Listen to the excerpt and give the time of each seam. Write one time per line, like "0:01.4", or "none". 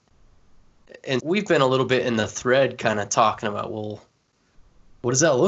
0:01.2